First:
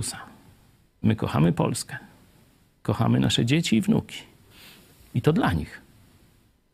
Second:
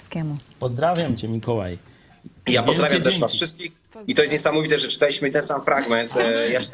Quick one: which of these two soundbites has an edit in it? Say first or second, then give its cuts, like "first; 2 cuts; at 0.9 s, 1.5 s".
second; 1 cut; at 5.3 s